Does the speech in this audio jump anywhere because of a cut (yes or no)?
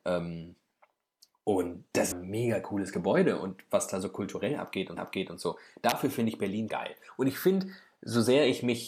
yes